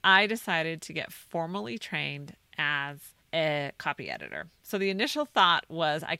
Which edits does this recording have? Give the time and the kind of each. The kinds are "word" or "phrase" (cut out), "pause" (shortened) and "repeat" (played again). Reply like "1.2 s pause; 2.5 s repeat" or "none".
3.2 s pause